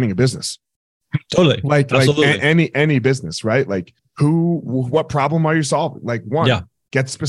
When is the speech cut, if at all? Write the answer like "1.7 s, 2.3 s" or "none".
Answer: 4.0 s